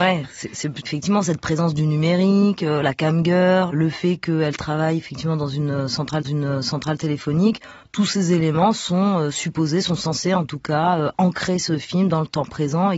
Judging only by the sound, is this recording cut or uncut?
cut